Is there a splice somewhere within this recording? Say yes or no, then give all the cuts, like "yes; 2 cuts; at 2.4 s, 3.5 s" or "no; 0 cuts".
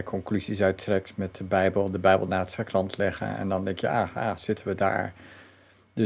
no; 0 cuts